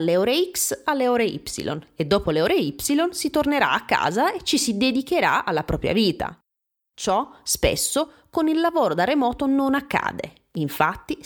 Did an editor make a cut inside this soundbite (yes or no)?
no